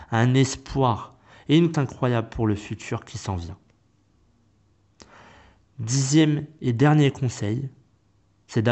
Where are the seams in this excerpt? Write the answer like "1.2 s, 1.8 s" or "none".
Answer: 1.7 s